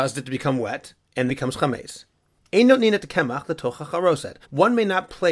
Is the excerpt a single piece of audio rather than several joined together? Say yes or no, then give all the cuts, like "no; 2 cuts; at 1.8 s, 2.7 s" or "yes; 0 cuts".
no; 2 cuts; at 1.3 s, 4.4 s